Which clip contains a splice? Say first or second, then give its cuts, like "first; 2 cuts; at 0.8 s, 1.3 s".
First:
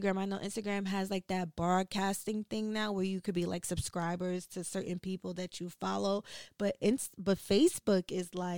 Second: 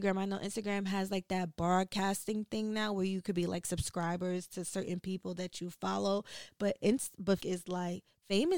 second; 1 cut; at 7.4 s